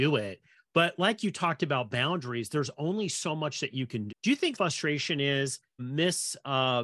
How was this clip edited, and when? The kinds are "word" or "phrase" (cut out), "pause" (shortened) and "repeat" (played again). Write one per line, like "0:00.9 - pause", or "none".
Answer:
0:04.1 - word
0:04.5 - phrase
0:05.8 - word